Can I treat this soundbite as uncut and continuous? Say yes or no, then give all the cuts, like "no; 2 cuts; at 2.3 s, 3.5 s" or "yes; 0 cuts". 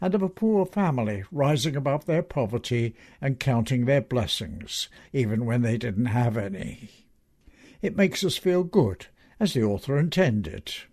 yes; 0 cuts